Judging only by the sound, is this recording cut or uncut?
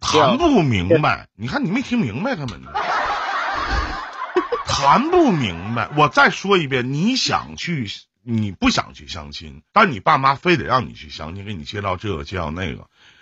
cut